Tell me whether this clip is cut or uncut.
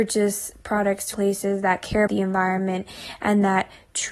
cut